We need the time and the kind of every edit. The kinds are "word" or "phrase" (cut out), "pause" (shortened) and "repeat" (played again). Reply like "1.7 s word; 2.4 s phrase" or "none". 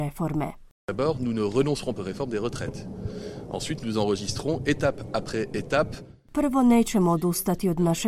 2.0 s phrase